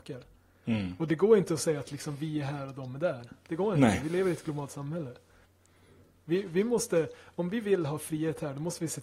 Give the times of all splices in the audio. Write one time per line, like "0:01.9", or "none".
none